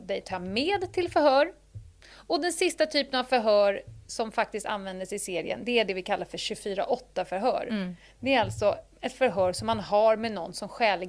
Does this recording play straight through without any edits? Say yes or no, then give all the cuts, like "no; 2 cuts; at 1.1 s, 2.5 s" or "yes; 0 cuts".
yes; 0 cuts